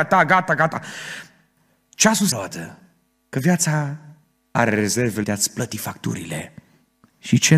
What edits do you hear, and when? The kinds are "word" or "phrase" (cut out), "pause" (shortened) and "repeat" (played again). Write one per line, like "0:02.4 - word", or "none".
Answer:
0:02.3 - word
0:05.2 - word